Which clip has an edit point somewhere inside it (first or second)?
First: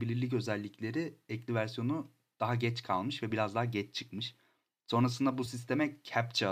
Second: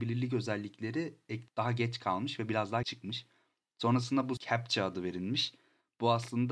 second